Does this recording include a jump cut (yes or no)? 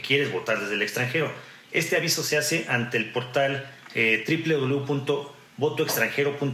no